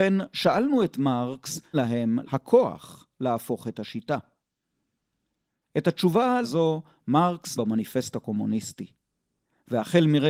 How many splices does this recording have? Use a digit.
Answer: 4